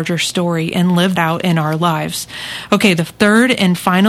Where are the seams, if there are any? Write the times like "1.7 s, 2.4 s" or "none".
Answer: 1.2 s